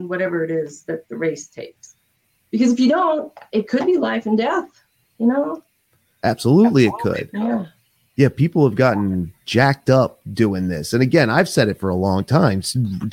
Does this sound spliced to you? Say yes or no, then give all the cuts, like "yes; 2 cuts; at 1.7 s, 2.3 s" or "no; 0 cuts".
no; 0 cuts